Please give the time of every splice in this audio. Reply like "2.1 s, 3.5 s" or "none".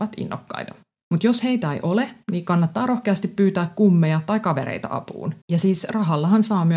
1.0 s, 5.4 s